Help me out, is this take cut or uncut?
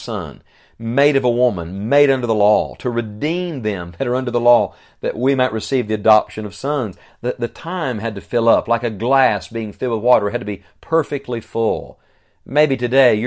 uncut